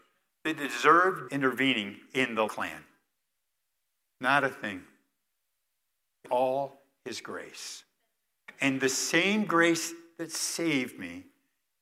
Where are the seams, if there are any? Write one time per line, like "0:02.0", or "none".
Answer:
0:01.3
0:02.5
0:06.2